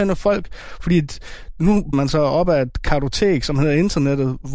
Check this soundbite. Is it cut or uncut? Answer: cut